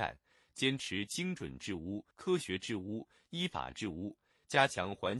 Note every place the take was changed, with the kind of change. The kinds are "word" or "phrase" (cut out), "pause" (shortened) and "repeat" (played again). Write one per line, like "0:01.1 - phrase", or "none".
0:02.1 - pause